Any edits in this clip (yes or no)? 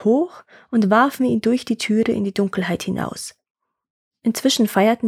no